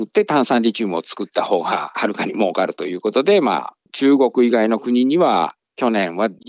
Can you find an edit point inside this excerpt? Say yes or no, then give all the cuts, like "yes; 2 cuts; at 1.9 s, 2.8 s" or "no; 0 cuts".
no; 0 cuts